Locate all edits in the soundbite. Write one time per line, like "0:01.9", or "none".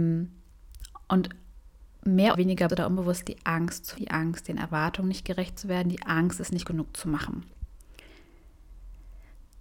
0:02.3
0:02.7
0:04.0
0:06.6